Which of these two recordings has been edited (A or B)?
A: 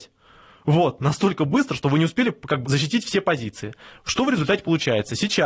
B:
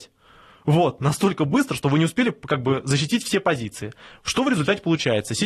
A